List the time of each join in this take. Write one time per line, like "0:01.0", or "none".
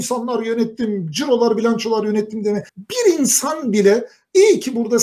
0:02.7

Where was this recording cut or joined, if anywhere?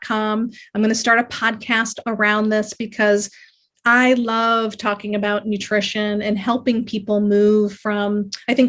0:02.0

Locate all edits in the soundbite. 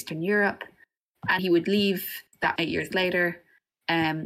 0:01.4
0:02.6

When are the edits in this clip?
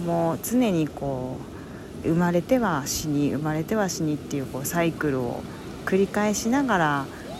0:02.0

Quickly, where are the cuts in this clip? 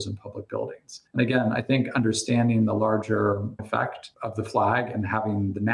0:03.6

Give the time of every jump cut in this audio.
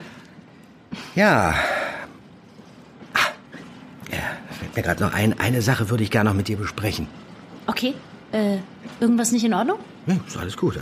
none

